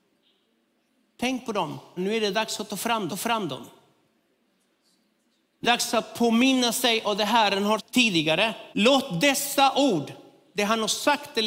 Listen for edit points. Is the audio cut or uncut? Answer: cut